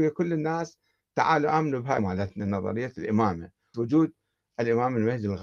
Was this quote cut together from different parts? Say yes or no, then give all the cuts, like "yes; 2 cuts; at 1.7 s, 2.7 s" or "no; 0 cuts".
yes; 2 cuts; at 2.0 s, 3.7 s